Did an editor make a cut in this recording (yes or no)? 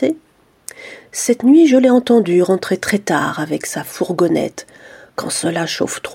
no